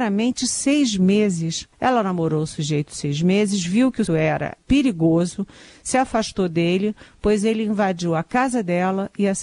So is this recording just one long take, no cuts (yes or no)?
no